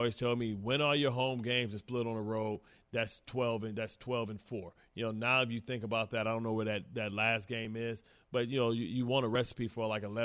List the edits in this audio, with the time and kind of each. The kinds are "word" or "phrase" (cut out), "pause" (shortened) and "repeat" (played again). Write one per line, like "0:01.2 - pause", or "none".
none